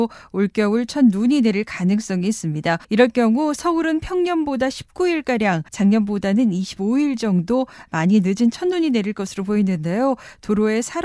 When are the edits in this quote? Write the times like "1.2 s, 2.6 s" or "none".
2.8 s, 5.7 s

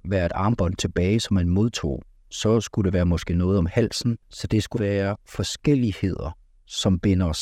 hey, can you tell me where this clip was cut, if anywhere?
4.2 s, 4.8 s

